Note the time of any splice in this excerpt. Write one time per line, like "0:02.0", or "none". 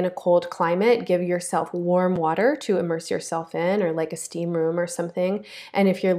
none